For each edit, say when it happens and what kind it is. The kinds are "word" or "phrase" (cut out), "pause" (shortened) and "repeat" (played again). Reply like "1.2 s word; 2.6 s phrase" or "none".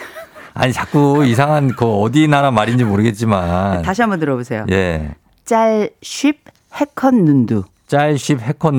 none